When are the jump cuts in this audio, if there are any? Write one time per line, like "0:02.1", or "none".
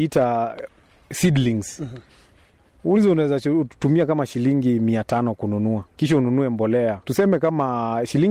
0:05.9
0:07.0